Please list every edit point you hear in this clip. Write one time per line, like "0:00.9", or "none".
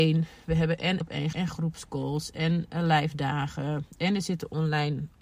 0:01.0
0:01.3